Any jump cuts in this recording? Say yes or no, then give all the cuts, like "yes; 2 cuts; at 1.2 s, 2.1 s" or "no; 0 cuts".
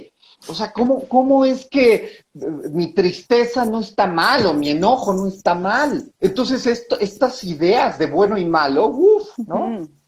yes; 1 cut; at 6.2 s